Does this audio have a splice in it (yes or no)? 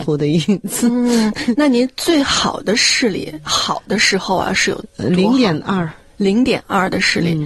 no